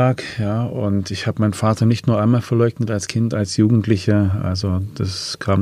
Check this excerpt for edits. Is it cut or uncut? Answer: uncut